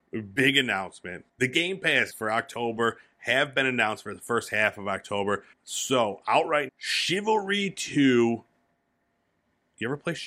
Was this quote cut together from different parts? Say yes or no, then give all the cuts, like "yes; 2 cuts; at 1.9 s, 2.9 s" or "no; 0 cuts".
yes; 4 cuts; at 1.3 s, 2.1 s, 5.5 s, 6.7 s